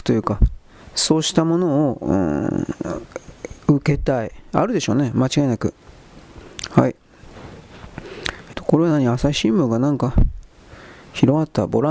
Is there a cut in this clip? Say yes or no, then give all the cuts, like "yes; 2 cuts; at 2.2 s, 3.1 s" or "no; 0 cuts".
yes; 1 cut; at 8.5 s